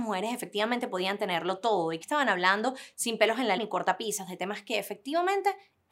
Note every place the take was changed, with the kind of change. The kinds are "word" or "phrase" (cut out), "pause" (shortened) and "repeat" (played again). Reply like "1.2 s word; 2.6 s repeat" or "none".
2.0 s word; 3.6 s word